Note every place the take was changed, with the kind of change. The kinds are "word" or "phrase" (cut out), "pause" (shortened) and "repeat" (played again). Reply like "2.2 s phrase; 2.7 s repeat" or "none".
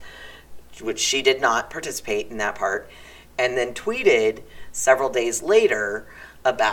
none

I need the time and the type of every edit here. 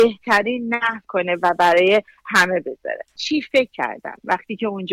1.0 s word; 3.2 s word

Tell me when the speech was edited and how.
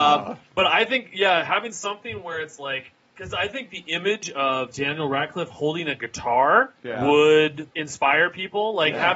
none

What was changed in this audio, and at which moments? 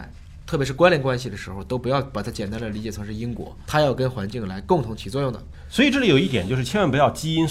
3.7 s word

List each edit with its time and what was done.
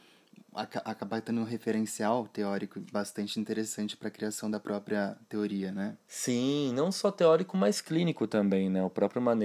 none

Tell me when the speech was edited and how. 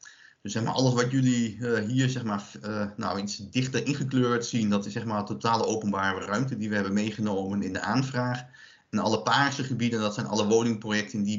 none

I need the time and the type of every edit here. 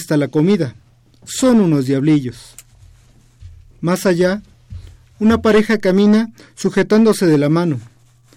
none

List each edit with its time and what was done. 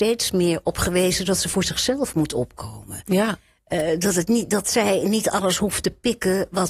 none

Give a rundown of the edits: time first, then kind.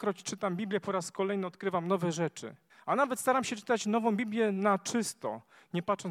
2.7 s pause

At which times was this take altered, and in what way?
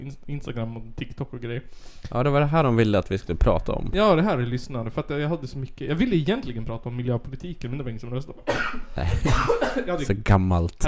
none

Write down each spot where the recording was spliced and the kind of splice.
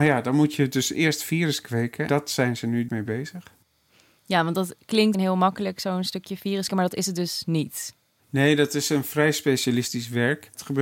2.1 s word; 2.9 s word; 5.1 s word; 6.7 s word

